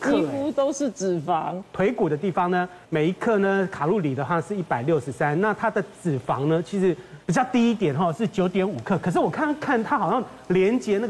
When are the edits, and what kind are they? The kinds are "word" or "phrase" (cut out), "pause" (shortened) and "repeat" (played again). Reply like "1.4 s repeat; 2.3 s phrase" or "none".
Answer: 2.8 s pause; 7.2 s pause